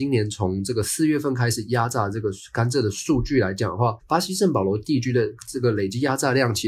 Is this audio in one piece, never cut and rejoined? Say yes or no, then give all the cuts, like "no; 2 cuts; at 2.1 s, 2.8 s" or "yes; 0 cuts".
no; 1 cut; at 4.0 s